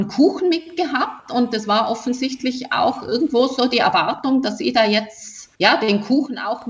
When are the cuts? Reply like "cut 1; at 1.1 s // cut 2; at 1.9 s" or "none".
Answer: cut 1; at 5.5 s